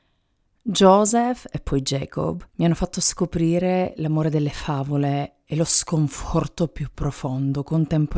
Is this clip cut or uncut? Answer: cut